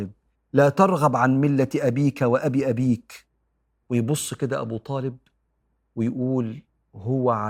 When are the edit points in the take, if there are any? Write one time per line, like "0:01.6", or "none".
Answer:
none